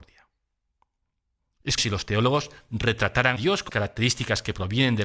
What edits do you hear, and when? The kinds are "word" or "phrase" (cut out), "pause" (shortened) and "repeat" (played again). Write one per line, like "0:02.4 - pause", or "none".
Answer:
0:01.8 - word
0:03.4 - word
0:03.7 - word